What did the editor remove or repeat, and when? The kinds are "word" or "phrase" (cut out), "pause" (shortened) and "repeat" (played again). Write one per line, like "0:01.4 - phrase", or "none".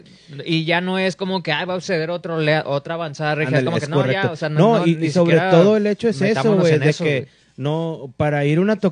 none